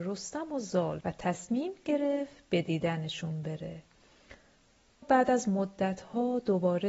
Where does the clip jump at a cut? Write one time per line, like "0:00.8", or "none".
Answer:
0:01.0
0:05.0